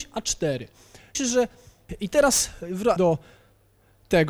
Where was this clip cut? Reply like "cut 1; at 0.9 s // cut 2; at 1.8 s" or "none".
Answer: cut 1; at 1.1 s // cut 2; at 3.0 s